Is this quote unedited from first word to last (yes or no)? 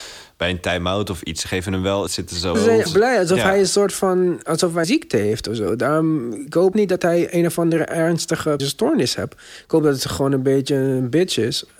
no